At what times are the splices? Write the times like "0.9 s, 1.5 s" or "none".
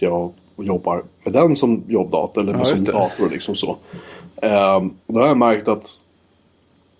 5.0 s